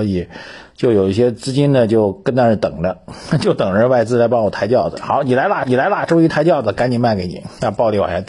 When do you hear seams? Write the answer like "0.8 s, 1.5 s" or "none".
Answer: 5.6 s